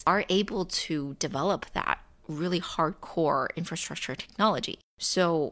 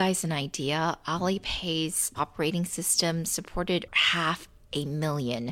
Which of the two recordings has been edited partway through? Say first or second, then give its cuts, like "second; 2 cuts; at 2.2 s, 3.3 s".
second; 2 cuts; at 2.1 s, 3.9 s